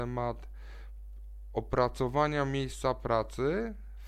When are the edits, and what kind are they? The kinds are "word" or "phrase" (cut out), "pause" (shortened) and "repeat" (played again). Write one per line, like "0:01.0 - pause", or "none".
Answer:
none

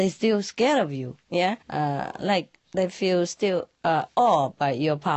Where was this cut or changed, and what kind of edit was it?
0:01.6 - pause
0:02.6 - pause
0:03.7 - pause

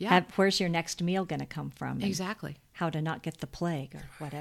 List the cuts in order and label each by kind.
none

